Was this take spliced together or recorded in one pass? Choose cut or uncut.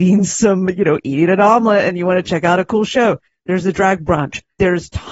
uncut